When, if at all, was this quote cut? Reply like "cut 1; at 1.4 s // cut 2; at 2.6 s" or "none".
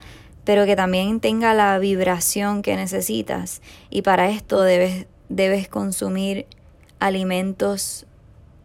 none